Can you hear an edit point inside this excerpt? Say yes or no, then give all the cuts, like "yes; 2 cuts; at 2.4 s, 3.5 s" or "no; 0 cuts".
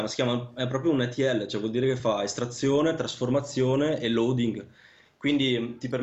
no; 0 cuts